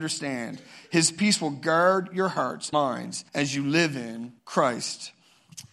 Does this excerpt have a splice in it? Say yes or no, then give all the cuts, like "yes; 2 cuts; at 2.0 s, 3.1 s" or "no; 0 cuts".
yes; 3 cuts; at 2.7 s, 3.3 s, 4.4 s